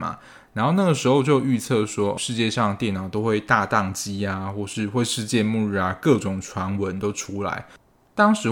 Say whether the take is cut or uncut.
cut